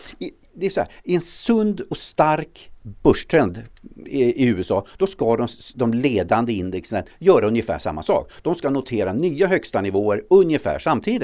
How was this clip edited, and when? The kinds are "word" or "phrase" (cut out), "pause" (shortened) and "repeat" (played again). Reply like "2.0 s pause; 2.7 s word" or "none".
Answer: none